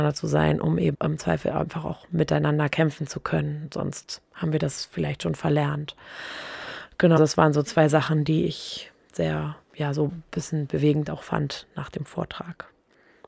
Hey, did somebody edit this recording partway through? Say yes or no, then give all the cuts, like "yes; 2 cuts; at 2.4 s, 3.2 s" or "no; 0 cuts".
yes; 3 cuts; at 0.9 s, 7.2 s, 9.6 s